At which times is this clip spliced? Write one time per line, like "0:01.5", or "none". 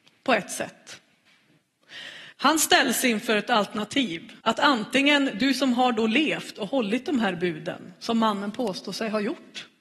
0:02.3
0:04.4